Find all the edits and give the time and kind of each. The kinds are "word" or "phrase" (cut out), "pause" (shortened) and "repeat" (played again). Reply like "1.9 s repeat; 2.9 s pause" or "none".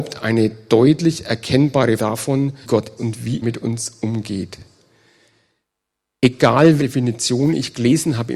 2.0 s word; 2.6 s word; 3.0 s word; 3.4 s word; 6.8 s word